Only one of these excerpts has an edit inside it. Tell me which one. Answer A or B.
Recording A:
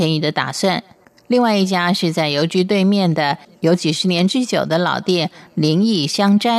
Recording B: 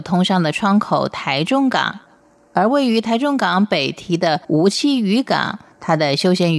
B